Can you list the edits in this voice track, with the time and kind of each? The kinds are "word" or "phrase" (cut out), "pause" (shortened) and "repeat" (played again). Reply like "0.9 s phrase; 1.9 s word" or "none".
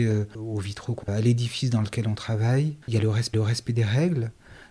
1.0 s word; 2.8 s pause; 3.3 s repeat

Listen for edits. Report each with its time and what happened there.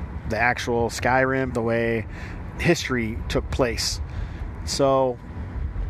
1.5 s word; 2.5 s word

